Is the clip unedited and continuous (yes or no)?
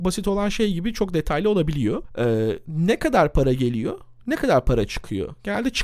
no